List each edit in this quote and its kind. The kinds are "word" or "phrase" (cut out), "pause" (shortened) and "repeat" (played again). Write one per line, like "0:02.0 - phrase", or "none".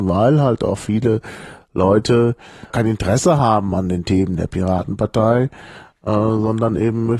0:02.7 - word